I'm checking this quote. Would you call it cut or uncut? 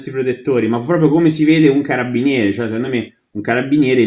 uncut